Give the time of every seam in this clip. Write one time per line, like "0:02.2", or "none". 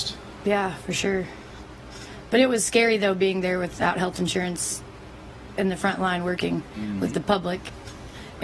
none